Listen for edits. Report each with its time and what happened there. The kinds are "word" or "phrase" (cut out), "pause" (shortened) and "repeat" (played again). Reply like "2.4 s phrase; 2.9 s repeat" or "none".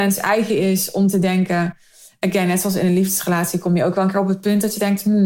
none